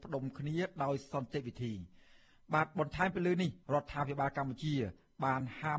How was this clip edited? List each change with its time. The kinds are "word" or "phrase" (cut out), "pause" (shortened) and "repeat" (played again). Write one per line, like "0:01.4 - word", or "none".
0:03.6 - pause